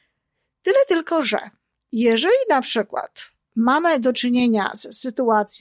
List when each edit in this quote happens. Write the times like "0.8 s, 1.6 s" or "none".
none